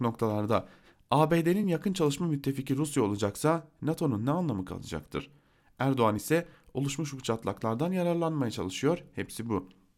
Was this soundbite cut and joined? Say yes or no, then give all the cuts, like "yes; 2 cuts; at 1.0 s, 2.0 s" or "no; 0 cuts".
no; 0 cuts